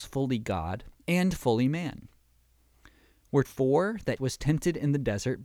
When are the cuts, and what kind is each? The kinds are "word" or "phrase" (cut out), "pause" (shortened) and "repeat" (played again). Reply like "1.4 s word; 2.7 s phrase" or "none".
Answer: 1.0 s pause; 3.4 s phrase; 4.2 s word